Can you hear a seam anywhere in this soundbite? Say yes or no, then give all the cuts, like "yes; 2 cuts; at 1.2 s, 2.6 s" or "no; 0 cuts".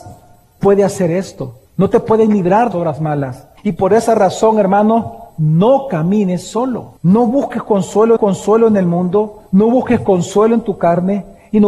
yes; 7 cuts; at 1.7 s, 2.7 s, 3.6 s, 5.3 s, 7.0 s, 8.2 s, 9.5 s